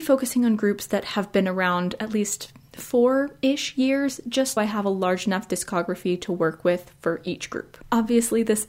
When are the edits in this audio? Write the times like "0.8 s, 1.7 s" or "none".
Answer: 4.6 s